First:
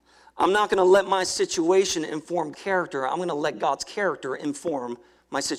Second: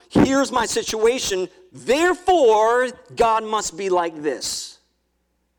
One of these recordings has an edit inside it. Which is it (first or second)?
first